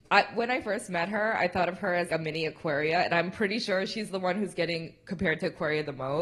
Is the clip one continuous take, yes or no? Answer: no